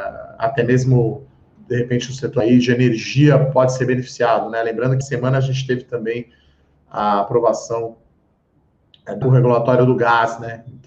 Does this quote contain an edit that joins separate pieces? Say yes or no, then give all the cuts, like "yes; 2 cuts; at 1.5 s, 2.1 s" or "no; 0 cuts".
yes; 4 cuts; at 1.6 s, 2.4 s, 5.0 s, 9.2 s